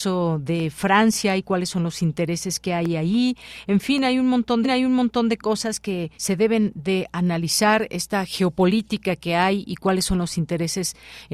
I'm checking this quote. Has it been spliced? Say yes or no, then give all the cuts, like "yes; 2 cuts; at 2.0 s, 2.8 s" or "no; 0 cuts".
yes; 2 cuts; at 4.6 s, 6.1 s